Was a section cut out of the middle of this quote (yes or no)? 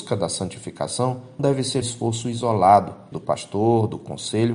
yes